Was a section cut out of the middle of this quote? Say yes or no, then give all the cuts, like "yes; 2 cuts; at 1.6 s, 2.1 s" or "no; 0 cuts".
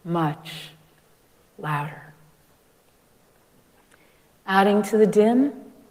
no; 0 cuts